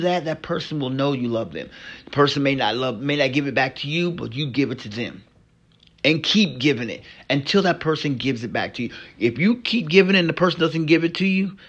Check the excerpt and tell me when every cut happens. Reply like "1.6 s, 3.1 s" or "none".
none